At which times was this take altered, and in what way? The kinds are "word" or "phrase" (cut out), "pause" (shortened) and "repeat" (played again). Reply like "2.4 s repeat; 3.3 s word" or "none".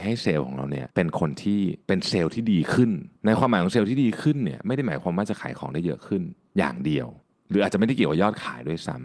0.9 s pause; 1.8 s pause; 3.2 s pause; 7.2 s pause